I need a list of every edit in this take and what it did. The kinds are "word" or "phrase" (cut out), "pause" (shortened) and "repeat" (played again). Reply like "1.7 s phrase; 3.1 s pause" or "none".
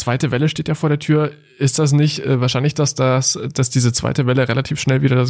none